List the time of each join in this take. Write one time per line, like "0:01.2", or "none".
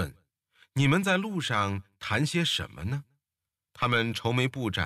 0:03.4